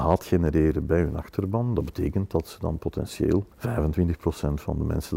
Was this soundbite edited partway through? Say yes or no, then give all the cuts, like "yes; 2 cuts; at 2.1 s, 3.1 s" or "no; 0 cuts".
yes; 1 cut; at 3.5 s